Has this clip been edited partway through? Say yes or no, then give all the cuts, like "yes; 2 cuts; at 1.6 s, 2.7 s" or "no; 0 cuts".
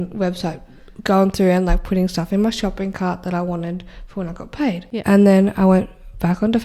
no; 0 cuts